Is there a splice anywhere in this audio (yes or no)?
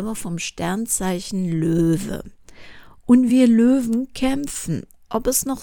no